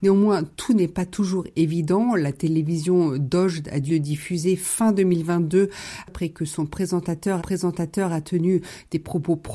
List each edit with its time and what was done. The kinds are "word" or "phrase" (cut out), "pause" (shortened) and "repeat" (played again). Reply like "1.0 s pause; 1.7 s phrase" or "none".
3.9 s word; 7.4 s repeat